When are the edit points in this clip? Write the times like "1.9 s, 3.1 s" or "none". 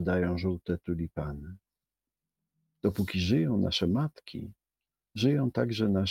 none